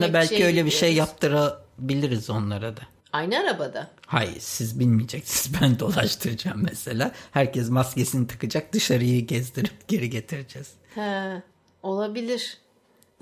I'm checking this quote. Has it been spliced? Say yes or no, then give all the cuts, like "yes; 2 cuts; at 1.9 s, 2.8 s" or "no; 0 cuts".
yes; 1 cut; at 3.0 s